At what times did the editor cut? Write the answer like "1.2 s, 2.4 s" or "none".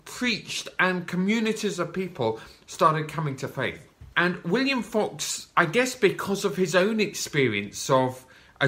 4.1 s